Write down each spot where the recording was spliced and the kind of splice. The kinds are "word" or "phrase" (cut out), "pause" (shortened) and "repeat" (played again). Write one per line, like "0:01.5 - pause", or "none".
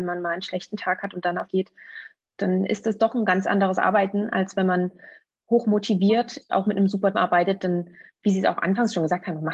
0:01.5 - word
0:06.5 - word
0:07.1 - word

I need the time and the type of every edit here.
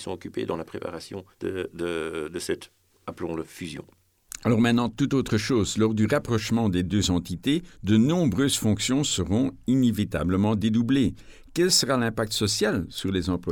0:01.3 - pause
0:07.7 - pause

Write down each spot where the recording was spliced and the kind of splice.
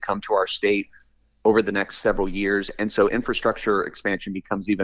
none

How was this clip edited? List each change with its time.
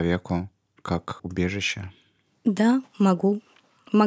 0:01.2 - phrase

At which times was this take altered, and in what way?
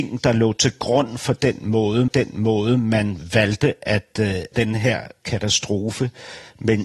0:02.1 - repeat
0:04.5 - phrase

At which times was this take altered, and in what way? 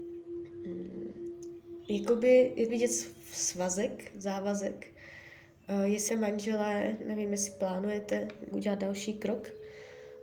0:02.7 - word
0:06.1 - word
0:08.5 - word

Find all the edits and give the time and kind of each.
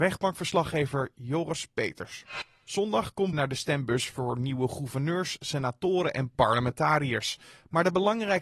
0:03.3 - word

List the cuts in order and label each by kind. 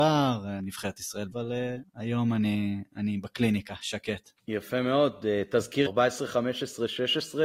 0:01.3 - word
0:04.4 - pause
0:05.9 - word

